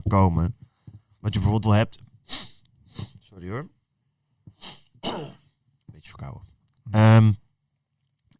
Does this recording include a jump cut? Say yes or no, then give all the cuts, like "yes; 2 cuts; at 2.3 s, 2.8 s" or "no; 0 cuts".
yes; 1 cut; at 1.6 s